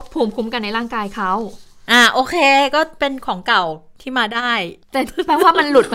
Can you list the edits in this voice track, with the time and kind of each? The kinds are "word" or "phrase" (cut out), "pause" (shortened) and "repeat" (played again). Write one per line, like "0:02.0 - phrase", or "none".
0:04.8 - pause